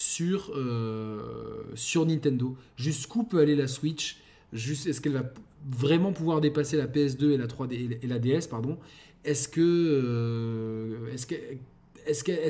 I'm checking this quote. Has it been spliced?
no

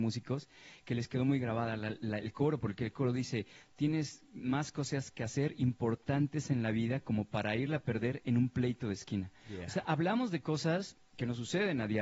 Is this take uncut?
yes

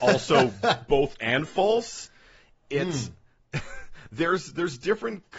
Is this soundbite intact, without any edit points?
no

